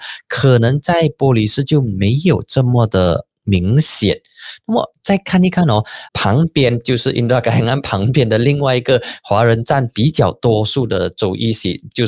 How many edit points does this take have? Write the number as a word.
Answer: one